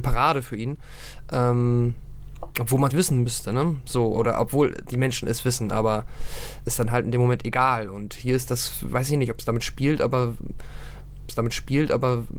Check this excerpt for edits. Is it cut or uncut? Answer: cut